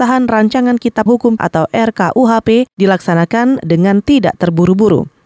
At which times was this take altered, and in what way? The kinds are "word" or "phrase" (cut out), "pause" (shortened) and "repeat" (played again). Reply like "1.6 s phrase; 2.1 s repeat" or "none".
1.1 s word; 1.4 s word; 2.7 s pause